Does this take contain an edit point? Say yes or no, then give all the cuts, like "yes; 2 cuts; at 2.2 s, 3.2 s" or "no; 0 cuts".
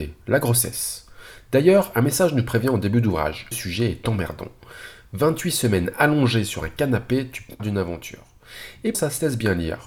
yes; 3 cuts; at 3.5 s, 7.6 s, 8.9 s